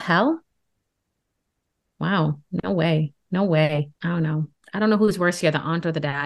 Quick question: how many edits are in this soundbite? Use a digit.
1